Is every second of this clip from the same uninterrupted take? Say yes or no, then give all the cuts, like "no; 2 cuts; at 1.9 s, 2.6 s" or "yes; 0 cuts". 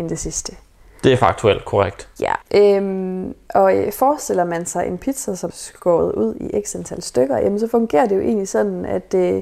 no; 2 cuts; at 2.4 s, 5.5 s